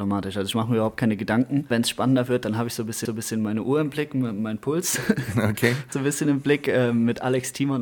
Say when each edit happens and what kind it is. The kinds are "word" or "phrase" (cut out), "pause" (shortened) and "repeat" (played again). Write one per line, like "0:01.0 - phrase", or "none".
0:03.1 - repeat
0:05.9 - word